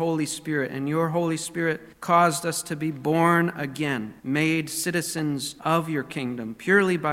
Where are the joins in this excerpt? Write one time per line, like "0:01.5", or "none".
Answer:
0:01.9
0:04.2
0:05.6